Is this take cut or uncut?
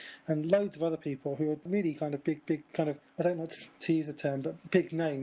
cut